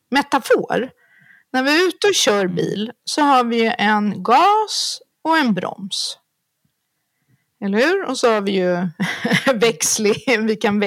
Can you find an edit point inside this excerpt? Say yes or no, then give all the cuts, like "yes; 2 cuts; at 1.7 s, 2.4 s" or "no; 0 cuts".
no; 0 cuts